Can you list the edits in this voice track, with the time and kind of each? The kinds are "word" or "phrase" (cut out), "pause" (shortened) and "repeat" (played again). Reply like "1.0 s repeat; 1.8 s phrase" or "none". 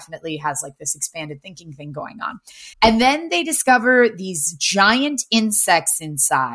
2.7 s pause